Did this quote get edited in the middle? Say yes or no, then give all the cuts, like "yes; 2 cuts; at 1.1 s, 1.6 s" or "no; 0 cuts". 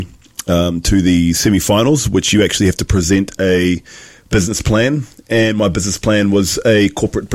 no; 0 cuts